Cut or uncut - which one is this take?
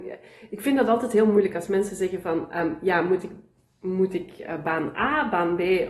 uncut